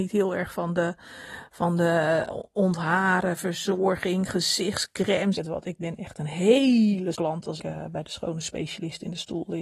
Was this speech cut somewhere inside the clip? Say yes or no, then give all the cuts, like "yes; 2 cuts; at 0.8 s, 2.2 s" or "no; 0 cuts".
yes; 3 cuts; at 5.3 s, 7.1 s, 7.6 s